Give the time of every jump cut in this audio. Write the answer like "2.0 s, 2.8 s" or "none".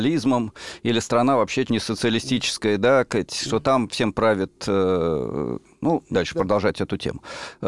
1.7 s, 6.1 s